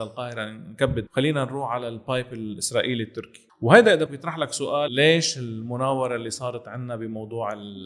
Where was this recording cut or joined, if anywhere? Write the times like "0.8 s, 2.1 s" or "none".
1.1 s, 3.5 s, 4.1 s, 4.9 s